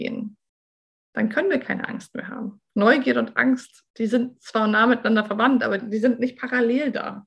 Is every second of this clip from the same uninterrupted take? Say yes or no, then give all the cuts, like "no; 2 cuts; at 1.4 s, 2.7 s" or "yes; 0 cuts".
no; 2 cuts; at 3.9 s, 5.8 s